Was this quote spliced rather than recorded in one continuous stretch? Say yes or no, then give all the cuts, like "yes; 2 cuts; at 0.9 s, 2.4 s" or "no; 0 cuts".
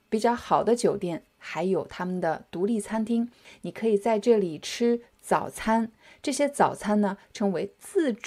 no; 0 cuts